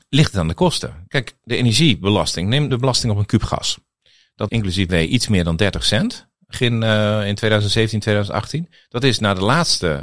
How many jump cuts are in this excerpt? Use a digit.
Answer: 4